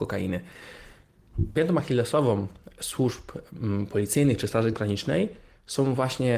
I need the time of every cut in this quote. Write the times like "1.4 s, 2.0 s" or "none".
none